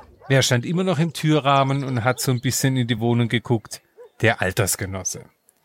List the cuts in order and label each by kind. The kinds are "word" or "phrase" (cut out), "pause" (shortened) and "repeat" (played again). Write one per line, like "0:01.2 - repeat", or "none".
none